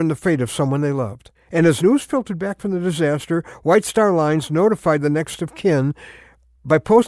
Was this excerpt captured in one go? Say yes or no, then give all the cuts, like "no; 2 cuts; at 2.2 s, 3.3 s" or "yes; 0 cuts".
no; 1 cut; at 1.3 s